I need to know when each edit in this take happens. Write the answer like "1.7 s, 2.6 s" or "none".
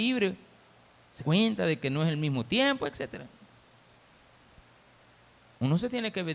1.2 s